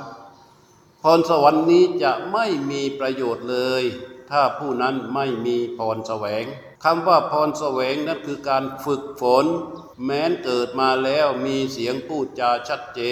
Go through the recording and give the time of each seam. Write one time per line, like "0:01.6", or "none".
0:06.8
0:09.9